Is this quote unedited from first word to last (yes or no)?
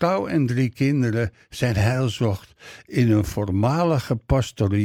yes